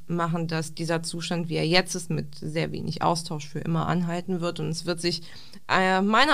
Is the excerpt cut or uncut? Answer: uncut